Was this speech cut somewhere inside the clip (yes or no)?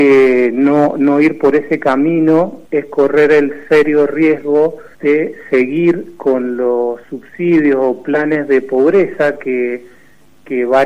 yes